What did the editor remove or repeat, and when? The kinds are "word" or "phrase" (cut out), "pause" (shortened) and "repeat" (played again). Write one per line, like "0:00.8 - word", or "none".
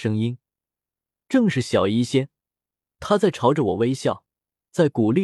none